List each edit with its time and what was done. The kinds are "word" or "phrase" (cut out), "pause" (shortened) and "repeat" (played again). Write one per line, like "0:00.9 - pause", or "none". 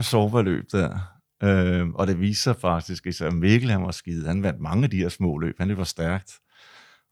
none